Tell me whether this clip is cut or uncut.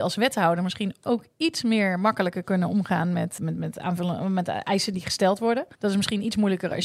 cut